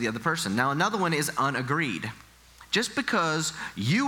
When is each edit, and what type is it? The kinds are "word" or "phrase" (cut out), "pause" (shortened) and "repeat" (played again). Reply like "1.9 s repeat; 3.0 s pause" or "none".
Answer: none

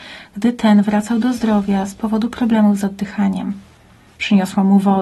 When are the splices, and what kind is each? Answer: none

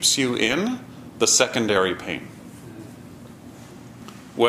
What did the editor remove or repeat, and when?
none

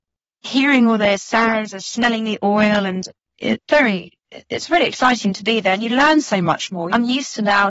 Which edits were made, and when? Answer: none

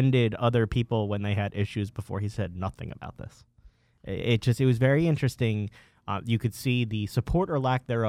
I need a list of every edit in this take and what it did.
none

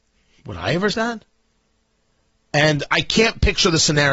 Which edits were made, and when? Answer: 0.9 s phrase

